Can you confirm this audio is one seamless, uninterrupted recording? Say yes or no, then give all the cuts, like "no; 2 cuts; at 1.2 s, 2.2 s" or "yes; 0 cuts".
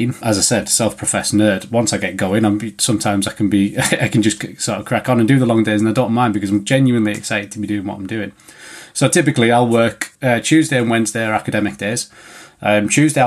yes; 0 cuts